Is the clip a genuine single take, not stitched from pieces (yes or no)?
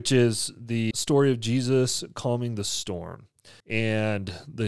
no